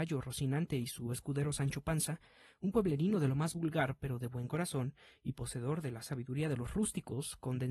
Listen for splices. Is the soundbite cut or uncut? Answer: uncut